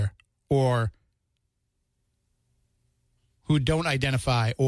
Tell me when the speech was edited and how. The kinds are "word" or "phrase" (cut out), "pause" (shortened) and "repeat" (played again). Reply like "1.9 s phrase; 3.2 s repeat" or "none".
none